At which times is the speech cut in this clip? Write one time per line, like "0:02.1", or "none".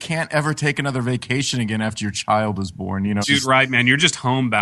0:03.2